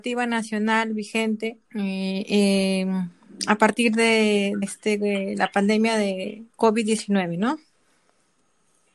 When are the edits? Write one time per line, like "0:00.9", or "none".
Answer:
0:01.6
0:04.6
0:06.5